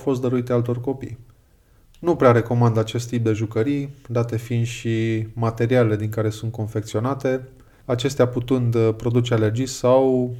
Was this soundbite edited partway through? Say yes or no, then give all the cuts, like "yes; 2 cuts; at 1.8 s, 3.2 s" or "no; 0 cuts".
no; 0 cuts